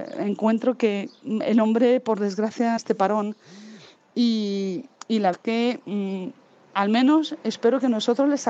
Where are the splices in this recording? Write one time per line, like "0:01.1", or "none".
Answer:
0:02.8
0:05.3

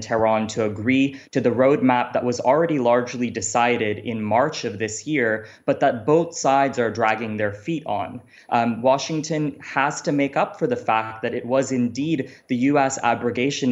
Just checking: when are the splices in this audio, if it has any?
none

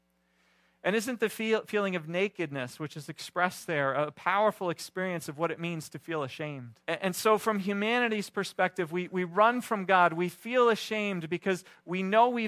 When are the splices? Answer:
0:06.8

